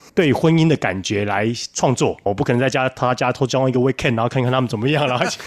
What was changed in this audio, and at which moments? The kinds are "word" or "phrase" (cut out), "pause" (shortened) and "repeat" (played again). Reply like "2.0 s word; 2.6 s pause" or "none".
none

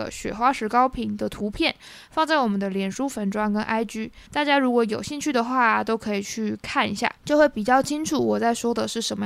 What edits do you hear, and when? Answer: 4.3 s pause; 7.2 s pause

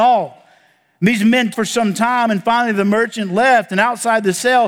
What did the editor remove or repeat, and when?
1.5 s word

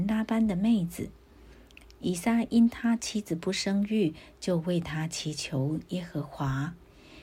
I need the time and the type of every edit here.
none

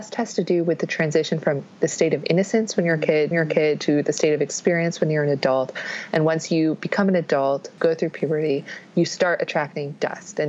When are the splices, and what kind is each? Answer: 3.3 s repeat

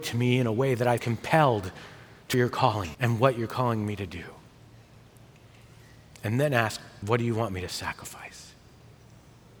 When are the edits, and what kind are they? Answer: 1.0 s word; 2.3 s word; 2.9 s word; 7.0 s word

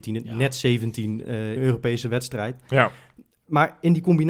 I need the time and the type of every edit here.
1.6 s word

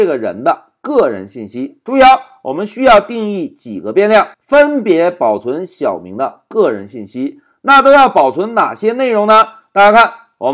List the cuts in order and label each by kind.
4.3 s pause

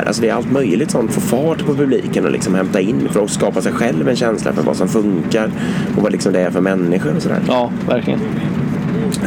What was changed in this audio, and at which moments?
1.1 s phrase

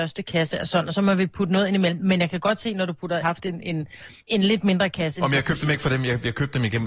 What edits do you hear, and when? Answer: 3.2 s phrase; 4.2 s pause

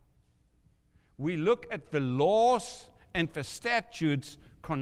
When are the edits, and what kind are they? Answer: none

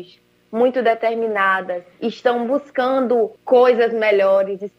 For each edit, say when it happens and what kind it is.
1.9 s pause; 3.4 s pause

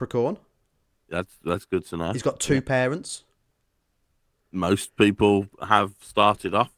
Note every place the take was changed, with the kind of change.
none

